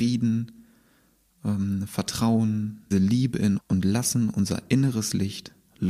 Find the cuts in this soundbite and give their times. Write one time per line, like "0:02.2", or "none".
0:02.9
0:03.6